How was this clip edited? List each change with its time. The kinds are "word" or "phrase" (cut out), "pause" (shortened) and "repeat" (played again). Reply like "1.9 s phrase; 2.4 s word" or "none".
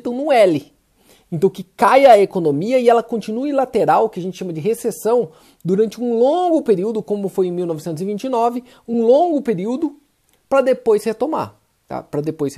none